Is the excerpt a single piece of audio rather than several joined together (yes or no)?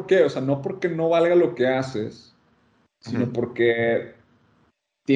yes